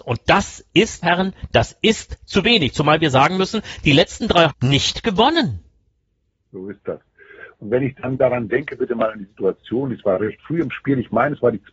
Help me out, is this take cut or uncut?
cut